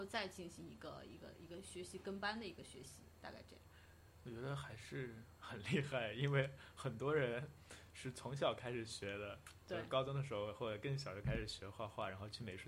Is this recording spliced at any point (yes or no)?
no